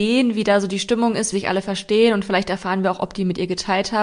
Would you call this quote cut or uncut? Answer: cut